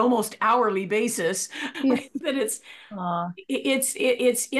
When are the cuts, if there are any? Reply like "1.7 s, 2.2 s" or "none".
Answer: 1.7 s, 2.2 s